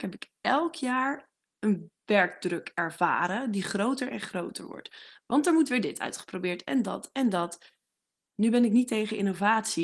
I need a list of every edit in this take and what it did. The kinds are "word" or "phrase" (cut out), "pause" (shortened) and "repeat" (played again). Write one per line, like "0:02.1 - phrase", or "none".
none